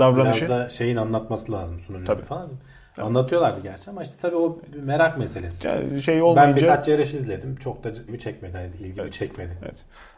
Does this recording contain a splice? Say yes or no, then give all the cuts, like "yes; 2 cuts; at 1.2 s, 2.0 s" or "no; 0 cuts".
yes; 2 cuts; at 2.2 s, 8.1 s